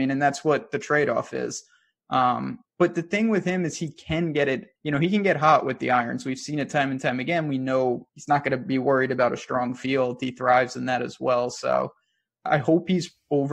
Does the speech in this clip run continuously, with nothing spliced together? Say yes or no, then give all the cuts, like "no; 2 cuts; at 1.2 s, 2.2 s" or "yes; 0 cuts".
no; 3 cuts; at 2.7 s, 4.8 s, 8.1 s